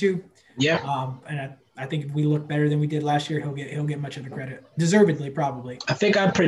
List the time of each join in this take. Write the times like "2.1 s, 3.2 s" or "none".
none